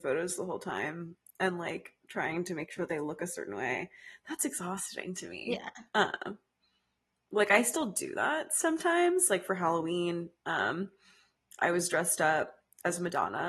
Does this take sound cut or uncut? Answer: uncut